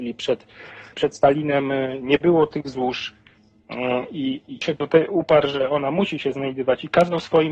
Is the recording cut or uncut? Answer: cut